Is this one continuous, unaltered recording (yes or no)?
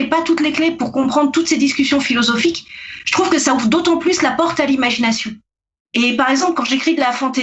yes